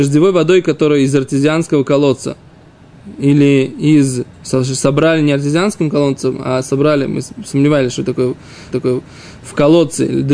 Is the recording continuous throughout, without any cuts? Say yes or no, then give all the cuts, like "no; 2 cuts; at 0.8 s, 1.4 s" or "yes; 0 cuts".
no; 2 cuts; at 4.3 s, 8.7 s